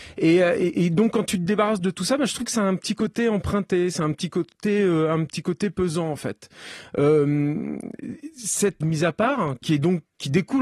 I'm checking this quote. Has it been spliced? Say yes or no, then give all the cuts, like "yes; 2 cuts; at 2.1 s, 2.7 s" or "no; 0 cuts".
yes; 1 cut; at 8.8 s